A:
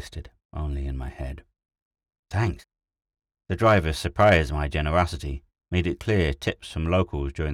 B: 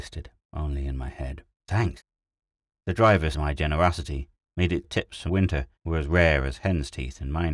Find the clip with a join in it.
B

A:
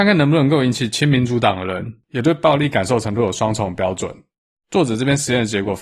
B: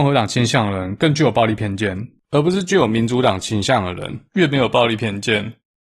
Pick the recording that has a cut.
B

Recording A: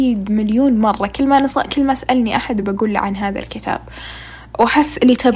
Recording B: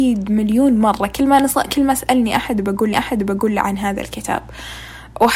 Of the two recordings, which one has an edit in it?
B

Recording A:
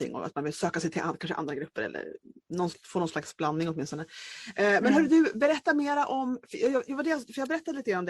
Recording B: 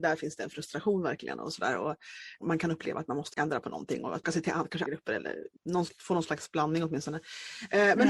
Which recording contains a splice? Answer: B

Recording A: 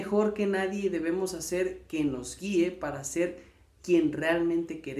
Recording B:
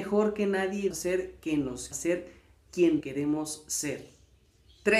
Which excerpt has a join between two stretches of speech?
B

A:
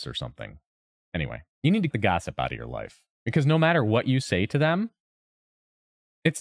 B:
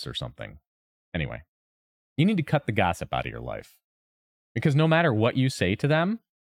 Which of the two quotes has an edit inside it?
A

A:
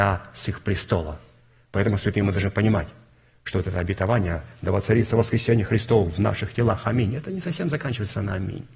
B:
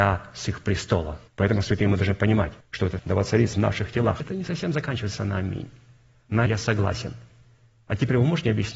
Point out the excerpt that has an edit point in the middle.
B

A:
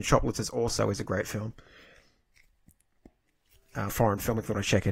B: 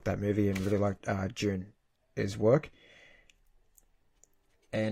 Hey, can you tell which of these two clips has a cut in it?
A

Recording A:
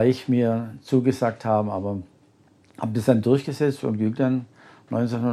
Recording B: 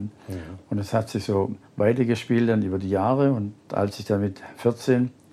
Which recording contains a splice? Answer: B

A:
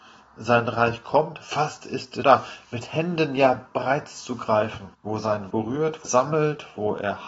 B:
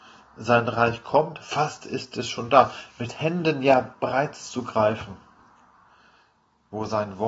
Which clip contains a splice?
A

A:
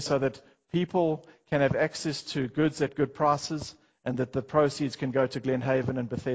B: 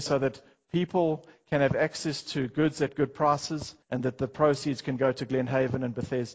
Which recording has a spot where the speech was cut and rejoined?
B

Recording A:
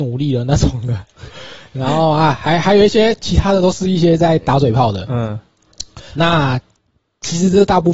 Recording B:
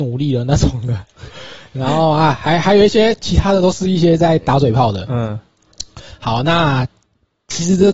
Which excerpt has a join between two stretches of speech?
A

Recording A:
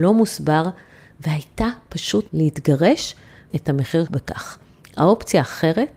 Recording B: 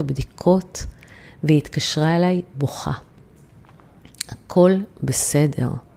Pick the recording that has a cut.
A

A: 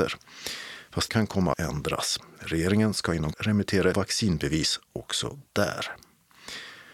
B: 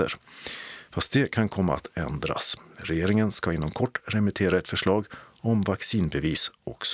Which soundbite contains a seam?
A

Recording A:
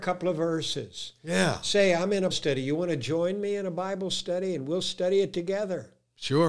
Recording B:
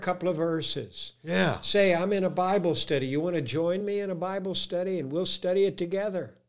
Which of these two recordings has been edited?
A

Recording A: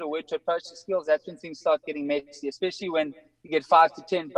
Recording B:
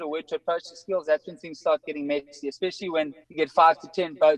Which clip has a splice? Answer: B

